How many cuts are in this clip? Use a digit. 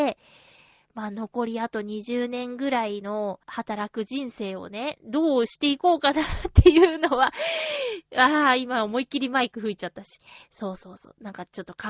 1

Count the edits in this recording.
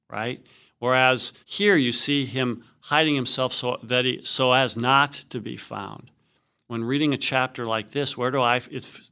1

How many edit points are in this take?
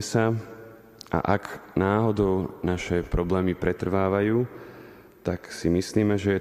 0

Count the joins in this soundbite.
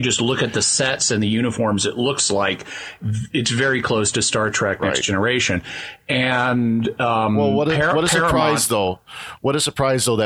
0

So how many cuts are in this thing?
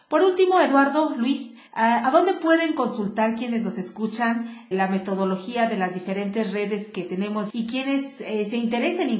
3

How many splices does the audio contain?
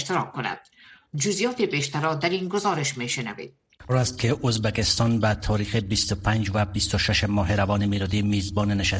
1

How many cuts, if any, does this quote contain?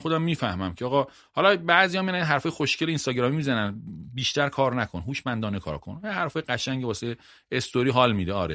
0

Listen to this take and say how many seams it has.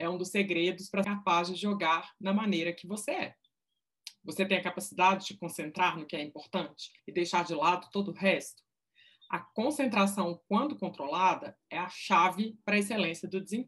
2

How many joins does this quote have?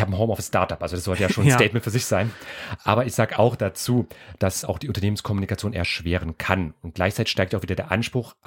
1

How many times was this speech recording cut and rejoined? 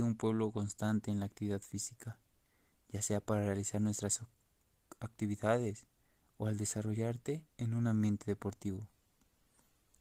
0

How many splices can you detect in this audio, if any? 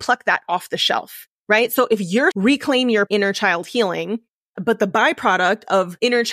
2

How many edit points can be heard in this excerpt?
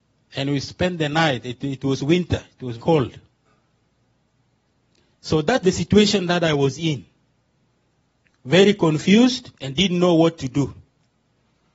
3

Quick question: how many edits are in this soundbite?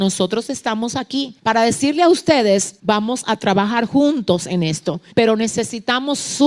3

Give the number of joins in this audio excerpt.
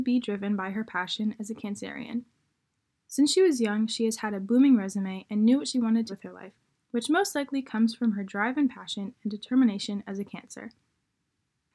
1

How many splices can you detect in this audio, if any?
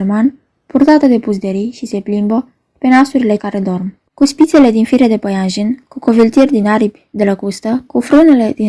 2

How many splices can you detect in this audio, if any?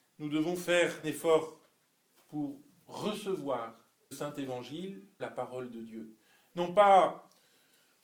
3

